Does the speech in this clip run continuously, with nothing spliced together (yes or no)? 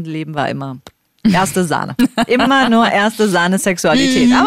yes